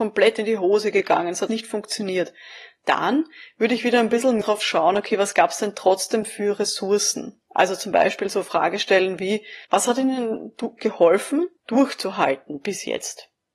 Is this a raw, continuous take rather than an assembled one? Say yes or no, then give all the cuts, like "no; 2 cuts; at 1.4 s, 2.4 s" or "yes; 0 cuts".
no; 4 cuts; at 1.5 s, 4.4 s, 9.6 s, 11.6 s